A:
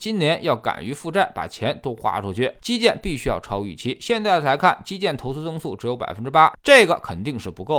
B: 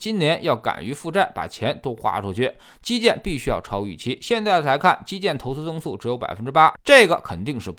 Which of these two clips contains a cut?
A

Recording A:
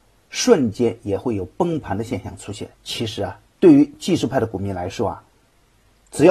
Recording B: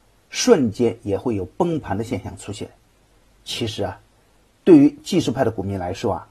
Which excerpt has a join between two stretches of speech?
A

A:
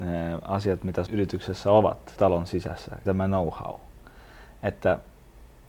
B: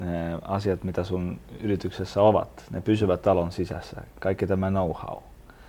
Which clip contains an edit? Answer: A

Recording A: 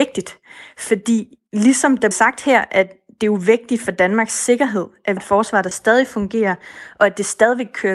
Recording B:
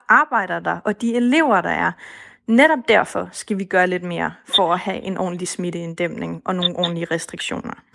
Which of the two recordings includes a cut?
A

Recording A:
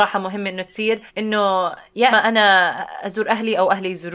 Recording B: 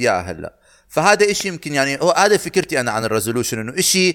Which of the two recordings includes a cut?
A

